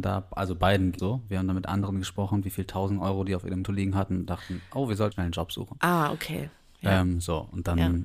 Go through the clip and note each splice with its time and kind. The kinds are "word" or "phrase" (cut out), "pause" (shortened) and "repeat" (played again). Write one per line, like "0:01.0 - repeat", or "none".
0:01.0 - word
0:03.6 - word
0:05.1 - word